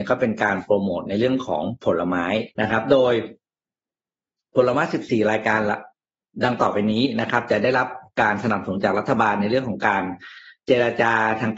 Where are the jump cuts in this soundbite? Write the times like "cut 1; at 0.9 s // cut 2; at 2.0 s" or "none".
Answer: cut 1; at 2.5 s